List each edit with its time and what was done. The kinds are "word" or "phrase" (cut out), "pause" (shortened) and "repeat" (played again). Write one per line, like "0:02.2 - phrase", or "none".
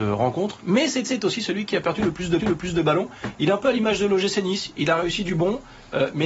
0:01.0 - repeat
0:02.4 - repeat

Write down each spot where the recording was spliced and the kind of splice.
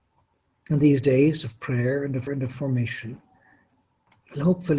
0:02.3 - repeat

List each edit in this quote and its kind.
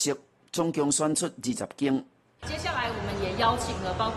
none

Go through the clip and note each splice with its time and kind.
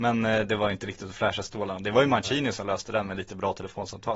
none

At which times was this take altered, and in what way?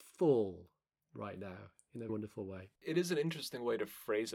0:02.1 - word
0:02.8 - pause

